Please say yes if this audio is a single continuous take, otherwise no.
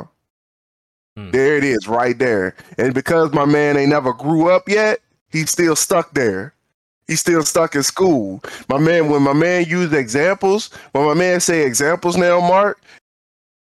yes